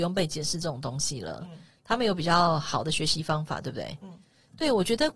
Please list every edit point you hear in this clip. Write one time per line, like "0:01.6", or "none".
none